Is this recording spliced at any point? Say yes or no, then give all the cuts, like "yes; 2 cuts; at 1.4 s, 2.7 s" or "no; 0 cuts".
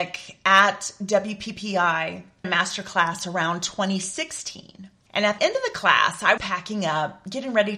yes; 3 cuts; at 2.4 s, 5.4 s, 6.4 s